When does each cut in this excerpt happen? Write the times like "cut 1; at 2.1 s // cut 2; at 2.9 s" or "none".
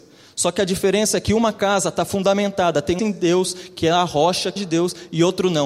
cut 1; at 3.0 s // cut 2; at 4.6 s